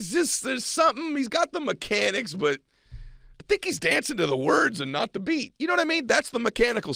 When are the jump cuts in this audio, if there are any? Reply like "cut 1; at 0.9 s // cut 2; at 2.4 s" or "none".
none